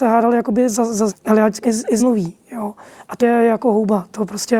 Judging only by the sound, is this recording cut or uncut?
cut